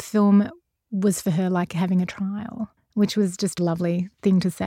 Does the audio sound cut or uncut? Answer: cut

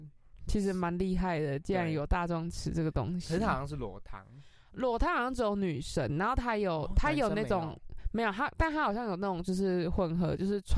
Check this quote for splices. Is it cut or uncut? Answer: uncut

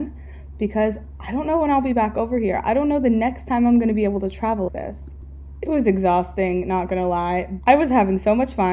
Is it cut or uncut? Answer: cut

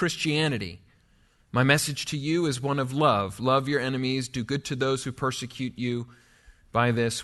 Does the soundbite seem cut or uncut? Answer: uncut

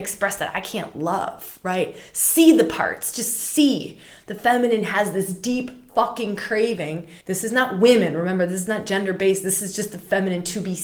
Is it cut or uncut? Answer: cut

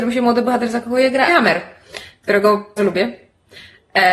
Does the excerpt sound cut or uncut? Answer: cut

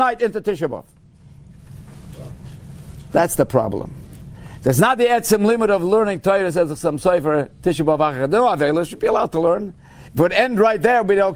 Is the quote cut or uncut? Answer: cut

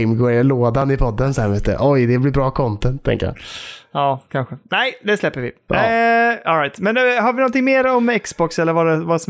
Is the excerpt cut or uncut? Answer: uncut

